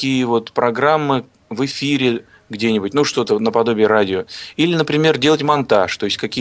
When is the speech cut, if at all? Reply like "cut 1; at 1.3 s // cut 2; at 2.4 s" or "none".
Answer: none